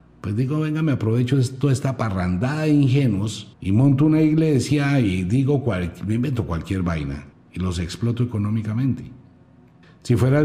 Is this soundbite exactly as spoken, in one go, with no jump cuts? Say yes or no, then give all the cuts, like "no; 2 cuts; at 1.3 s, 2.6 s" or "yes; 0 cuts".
no; 2 cuts; at 3.5 s, 7.3 s